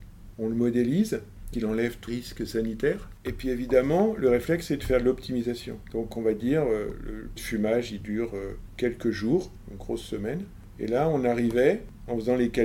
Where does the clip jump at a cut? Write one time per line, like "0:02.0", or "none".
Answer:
0:01.5
0:02.1
0:07.4